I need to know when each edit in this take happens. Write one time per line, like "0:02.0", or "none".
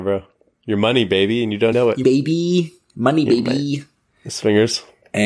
0:01.7
0:02.0